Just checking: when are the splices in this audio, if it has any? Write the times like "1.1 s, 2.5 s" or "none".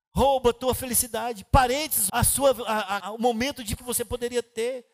2.1 s, 3.0 s, 3.8 s